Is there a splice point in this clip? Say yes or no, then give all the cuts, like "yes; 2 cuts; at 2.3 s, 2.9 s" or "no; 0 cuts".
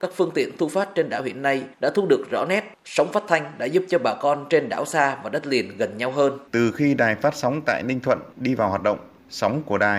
yes; 3 cuts; at 1.7 s, 6.5 s, 8.3 s